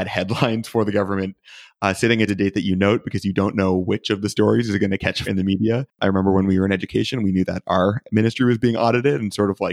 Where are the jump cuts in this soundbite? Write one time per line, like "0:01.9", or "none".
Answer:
0:02.3
0:05.2
0:05.9